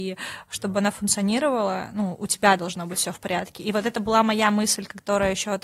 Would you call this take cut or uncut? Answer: uncut